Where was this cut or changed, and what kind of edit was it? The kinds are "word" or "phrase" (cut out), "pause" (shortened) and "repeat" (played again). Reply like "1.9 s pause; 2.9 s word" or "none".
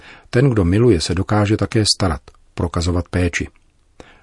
none

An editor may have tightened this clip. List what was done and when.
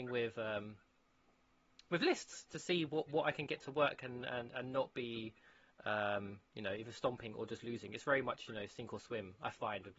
6.5 s pause

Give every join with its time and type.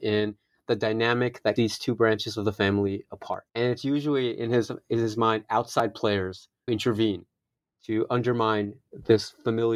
1.6 s word; 3.5 s pause; 6.7 s word

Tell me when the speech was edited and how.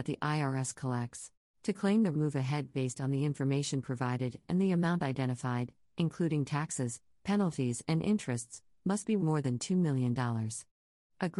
1.4 s pause; 2.1 s phrase; 9.2 s word

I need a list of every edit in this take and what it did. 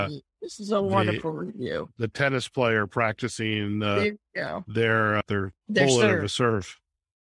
5.6 s pause

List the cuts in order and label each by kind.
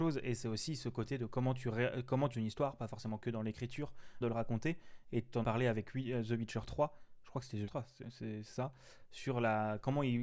2.3 s word; 4.2 s phrase; 5.4 s word; 7.7 s word

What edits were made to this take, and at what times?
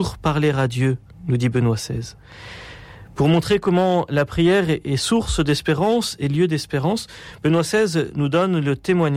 1.1 s pause

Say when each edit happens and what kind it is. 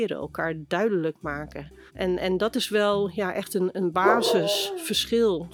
1.9 s pause

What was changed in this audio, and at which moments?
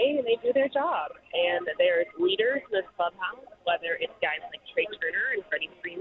none

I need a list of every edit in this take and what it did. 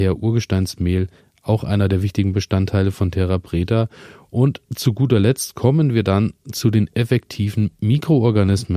none

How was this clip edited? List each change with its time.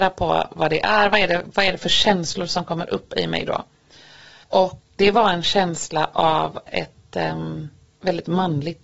none

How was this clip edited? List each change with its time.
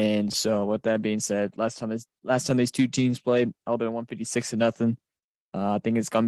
none

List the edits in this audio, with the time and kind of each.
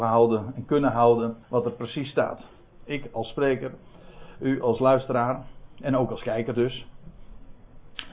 1.4 s pause

